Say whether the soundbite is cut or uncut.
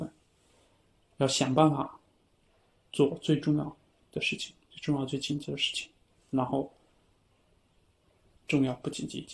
uncut